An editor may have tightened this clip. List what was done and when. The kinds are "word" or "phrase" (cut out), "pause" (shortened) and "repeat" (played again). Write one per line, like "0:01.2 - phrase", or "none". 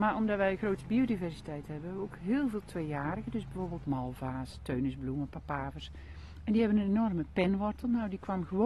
0:03.8 - word

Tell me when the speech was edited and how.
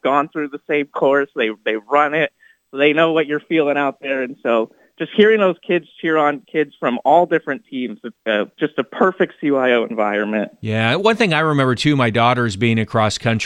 0:08.2 - word

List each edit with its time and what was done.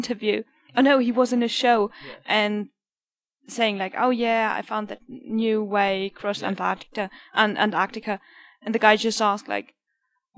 none

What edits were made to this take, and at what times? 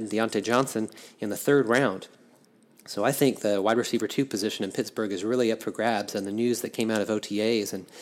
none

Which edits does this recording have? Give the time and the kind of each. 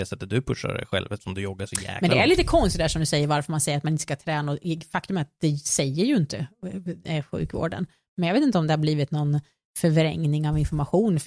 none

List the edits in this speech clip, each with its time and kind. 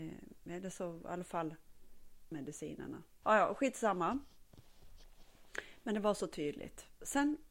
0:02.3 - word
0:03.2 - word

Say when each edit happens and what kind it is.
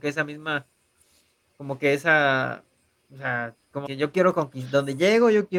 0:03.9 - word

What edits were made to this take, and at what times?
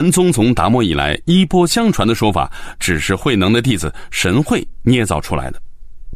none

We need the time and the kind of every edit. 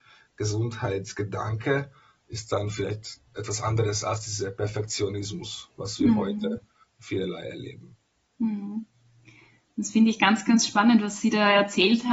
0:03.3 - pause

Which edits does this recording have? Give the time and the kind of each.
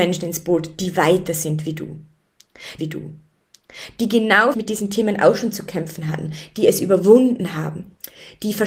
0:02.8 - repeat
0:04.5 - word

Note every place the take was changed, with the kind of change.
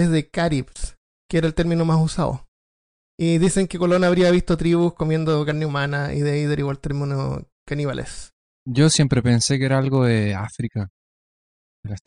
0:01.0 - pause

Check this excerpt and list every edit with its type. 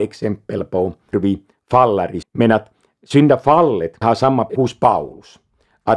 0:01.1 - word
0:02.2 - word
0:04.0 - word
0:04.5 - phrase

